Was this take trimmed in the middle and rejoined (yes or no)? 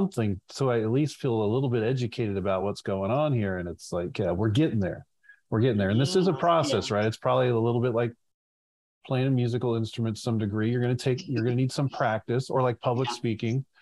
no